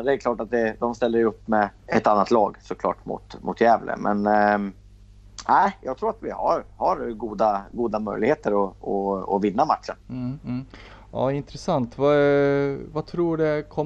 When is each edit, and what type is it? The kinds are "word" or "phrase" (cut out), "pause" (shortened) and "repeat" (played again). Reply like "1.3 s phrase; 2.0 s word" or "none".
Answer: 1.8 s pause; 10.0 s pause